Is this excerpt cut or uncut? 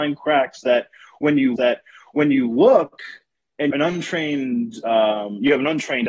cut